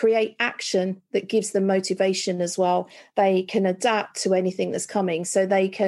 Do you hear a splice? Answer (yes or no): no